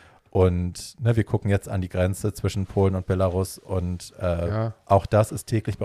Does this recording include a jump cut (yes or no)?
no